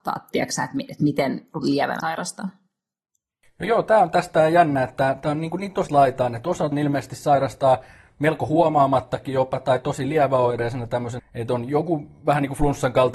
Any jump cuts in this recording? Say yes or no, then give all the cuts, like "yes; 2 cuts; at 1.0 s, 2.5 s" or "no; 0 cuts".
yes; 4 cuts; at 2.0 s, 5.9 s, 6.7 s, 11.2 s